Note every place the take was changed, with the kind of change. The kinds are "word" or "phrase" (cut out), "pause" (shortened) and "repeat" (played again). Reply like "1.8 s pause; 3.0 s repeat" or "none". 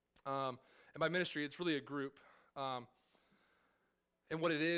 none